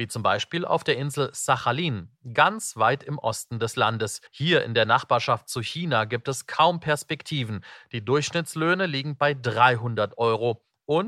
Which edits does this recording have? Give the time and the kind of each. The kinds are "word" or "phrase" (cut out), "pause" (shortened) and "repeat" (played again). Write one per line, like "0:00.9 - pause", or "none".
0:04.3 - pause